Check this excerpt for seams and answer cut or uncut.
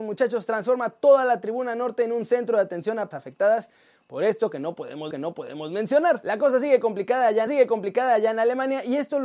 cut